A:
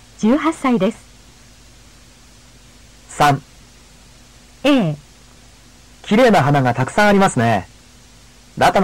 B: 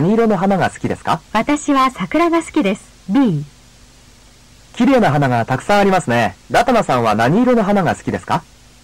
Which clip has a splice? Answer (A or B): B